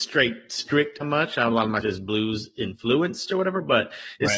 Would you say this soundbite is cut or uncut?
cut